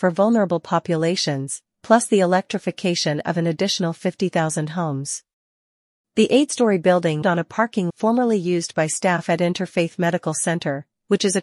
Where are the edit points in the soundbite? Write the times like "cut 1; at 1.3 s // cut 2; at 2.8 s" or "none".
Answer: cut 1; at 7.2 s // cut 2; at 7.9 s